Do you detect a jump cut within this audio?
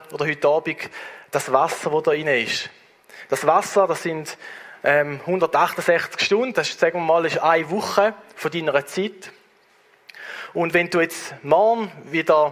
no; 0 cuts

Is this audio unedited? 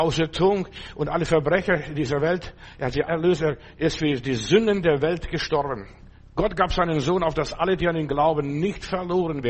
no; 1 cut; at 3.1 s

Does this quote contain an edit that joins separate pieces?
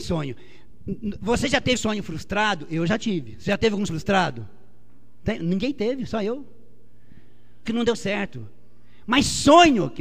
yes; 3 cuts; at 1.8 s, 3.9 s, 7.7 s

